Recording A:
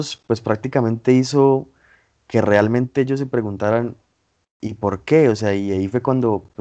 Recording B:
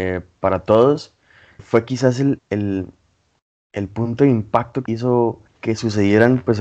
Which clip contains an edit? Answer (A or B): B